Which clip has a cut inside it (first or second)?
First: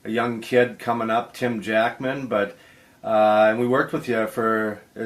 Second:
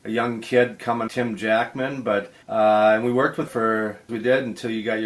second